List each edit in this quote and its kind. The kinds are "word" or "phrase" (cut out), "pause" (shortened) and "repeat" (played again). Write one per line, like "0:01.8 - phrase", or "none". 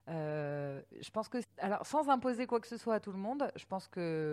0:01.4 - word